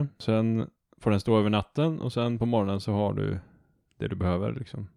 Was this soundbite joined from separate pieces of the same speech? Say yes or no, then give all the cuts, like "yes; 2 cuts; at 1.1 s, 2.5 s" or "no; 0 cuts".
no; 0 cuts